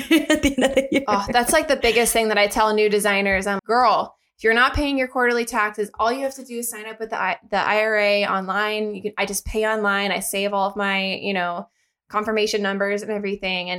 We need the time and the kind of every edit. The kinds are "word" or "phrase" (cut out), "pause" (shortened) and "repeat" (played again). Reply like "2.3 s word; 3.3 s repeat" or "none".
3.6 s word